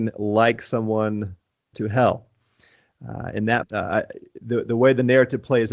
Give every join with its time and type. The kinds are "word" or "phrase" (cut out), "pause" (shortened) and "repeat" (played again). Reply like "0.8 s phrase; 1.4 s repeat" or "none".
1.7 s word; 3.6 s word